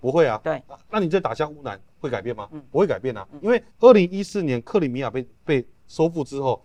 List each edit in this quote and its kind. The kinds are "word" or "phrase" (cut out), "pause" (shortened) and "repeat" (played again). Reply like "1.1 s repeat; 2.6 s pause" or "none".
1.9 s pause; 3.7 s pause